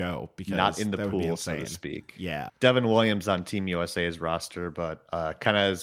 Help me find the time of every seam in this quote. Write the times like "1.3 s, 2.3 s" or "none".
2.5 s